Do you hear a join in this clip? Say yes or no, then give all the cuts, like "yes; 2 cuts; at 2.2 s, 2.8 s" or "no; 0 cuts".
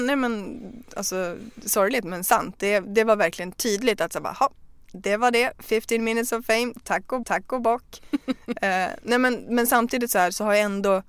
yes; 1 cut; at 7.2 s